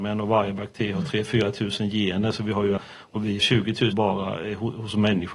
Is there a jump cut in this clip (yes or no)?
yes